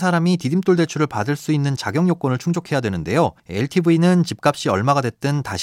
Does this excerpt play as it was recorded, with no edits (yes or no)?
no